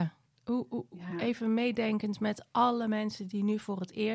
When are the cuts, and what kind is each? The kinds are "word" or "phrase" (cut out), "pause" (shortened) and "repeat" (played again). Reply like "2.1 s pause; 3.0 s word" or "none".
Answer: none